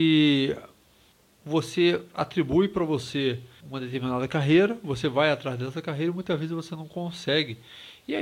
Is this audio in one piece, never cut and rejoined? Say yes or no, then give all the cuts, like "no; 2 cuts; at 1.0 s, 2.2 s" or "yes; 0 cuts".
no; 2 cuts; at 1.1 s, 3.6 s